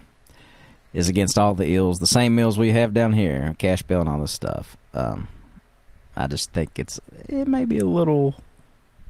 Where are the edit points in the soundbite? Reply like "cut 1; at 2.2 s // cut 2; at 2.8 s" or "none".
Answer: none